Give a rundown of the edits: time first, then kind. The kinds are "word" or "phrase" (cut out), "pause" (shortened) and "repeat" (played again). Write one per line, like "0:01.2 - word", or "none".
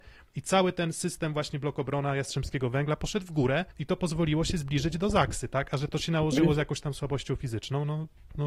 0:03.7 - pause